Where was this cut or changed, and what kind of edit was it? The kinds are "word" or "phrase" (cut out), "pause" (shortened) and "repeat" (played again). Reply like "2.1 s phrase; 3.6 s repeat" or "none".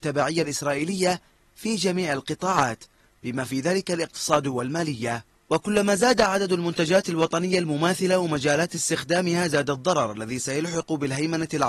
none